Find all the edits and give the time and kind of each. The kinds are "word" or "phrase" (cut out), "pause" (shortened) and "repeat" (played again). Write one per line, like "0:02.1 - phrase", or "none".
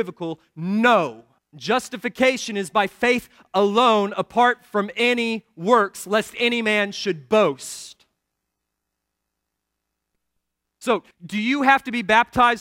0:01.4 - pause
0:11.1 - word